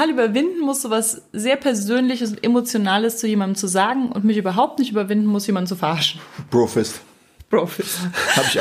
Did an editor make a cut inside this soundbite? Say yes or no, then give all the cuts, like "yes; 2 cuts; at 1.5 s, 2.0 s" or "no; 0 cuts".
no; 0 cuts